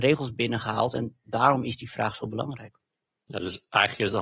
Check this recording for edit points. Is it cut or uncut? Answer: uncut